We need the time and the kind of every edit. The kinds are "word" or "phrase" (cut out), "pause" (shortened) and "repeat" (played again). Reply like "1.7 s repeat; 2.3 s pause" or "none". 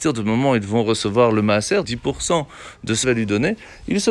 1.8 s word; 3.0 s phrase